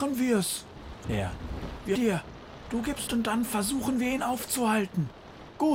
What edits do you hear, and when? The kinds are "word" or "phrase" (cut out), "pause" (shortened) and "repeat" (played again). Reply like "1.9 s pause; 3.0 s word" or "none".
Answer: 1.0 s word; 1.9 s word; 3.1 s phrase